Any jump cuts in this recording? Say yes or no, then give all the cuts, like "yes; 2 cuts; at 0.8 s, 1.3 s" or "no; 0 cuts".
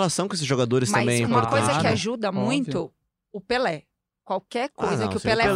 no; 0 cuts